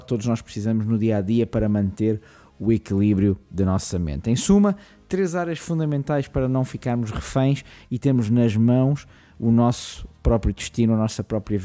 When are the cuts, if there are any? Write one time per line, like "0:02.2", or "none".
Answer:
none